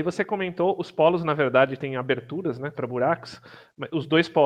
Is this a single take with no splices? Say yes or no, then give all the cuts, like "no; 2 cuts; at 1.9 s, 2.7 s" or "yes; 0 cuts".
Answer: no; 1 cut; at 2.7 s